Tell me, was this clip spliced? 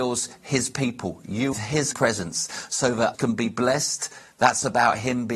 yes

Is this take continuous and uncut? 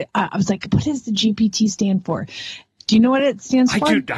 yes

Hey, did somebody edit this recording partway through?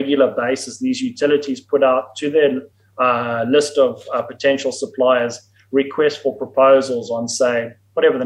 no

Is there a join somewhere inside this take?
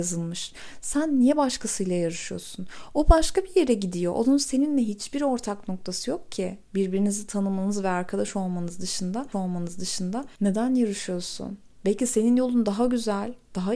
yes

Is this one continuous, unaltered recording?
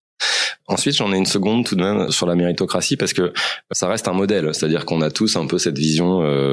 yes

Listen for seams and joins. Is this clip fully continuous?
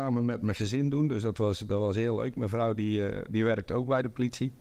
yes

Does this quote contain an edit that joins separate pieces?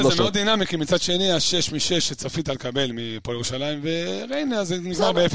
no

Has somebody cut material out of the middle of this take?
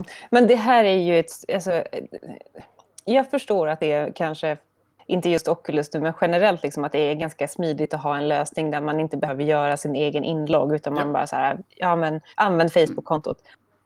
yes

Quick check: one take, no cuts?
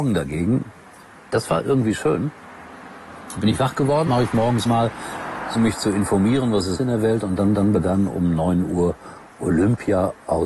no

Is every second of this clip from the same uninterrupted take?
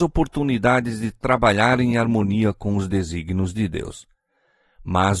yes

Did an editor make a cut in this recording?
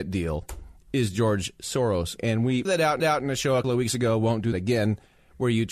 yes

